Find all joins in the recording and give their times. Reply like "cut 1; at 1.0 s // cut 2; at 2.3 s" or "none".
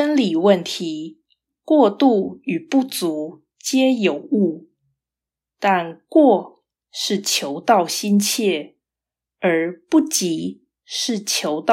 none